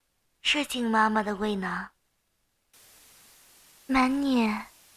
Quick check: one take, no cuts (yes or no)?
yes